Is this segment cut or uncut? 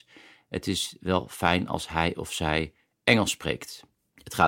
uncut